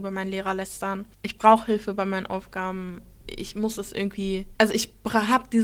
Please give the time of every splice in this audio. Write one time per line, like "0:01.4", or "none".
0:01.1
0:04.6